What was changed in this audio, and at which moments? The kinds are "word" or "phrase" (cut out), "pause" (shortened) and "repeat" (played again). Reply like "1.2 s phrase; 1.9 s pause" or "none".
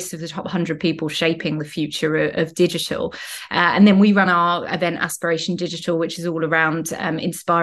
none